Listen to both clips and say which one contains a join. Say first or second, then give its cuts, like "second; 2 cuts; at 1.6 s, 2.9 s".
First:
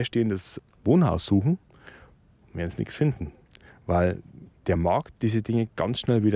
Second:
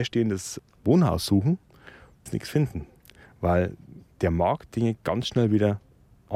second; 2 cuts; at 2.3 s, 4.7 s